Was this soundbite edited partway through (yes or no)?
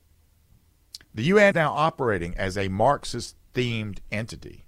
yes